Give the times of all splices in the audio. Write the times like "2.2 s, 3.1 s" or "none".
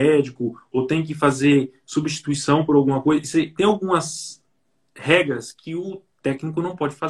none